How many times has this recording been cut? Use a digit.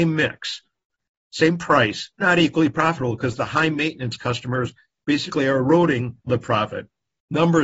2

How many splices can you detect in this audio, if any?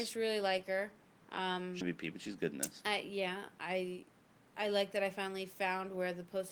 1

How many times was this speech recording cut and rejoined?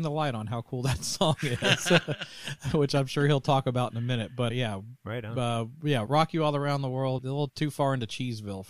4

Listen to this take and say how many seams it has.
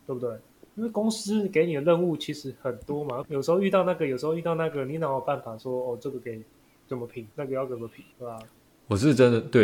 3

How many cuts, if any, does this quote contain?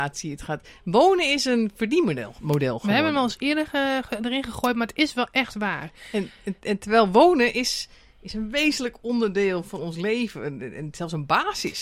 0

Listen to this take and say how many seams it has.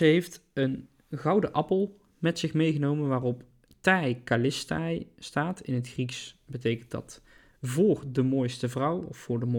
0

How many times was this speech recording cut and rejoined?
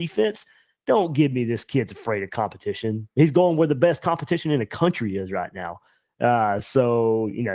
0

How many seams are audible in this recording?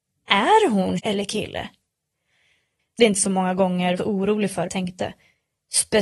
4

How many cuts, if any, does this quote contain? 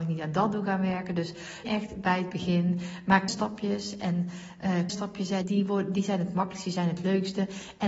4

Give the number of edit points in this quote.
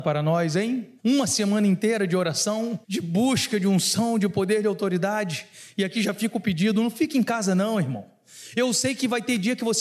2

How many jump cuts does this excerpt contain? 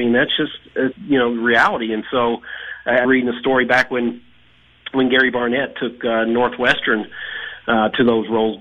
2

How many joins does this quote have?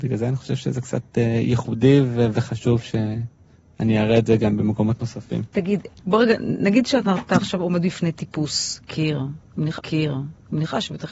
1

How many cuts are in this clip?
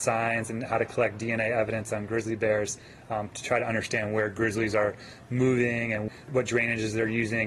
0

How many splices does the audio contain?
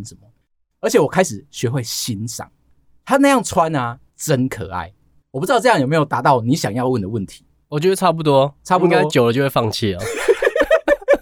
1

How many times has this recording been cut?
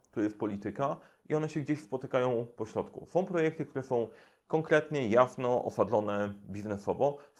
0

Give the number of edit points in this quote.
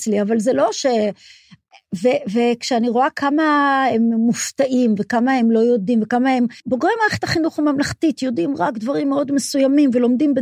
1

